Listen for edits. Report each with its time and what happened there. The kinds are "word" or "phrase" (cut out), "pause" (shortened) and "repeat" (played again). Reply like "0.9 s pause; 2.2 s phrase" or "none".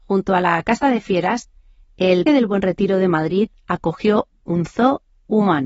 2.3 s word